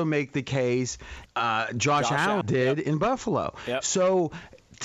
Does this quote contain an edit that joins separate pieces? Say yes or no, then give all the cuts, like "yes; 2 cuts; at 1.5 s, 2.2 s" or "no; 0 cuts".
yes; 2 cuts; at 1.3 s, 2.4 s